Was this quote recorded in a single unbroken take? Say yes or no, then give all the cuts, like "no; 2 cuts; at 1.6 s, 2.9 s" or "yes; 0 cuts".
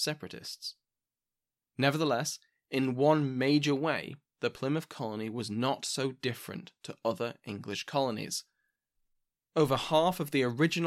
yes; 0 cuts